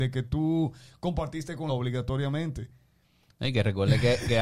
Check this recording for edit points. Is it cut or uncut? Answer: cut